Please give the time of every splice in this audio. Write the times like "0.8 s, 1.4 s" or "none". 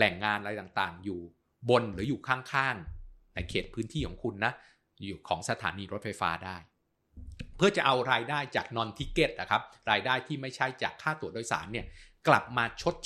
none